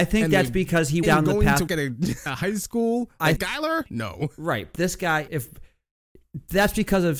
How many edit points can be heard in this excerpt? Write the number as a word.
six